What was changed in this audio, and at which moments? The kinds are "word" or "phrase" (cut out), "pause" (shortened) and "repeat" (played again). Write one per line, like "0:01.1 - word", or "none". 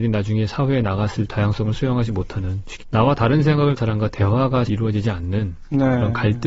0:01.3 - word
0:02.8 - word
0:03.8 - word
0:04.7 - word

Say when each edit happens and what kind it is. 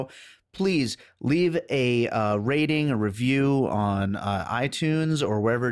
none

